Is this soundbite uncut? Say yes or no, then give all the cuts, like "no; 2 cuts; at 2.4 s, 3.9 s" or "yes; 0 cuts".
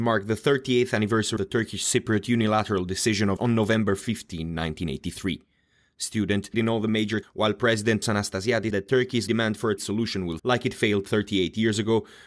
no; 9 cuts; at 1.4 s, 3.4 s, 6.5 s, 7.2 s, 8.0 s, 8.7 s, 9.3 s, 9.8 s, 10.4 s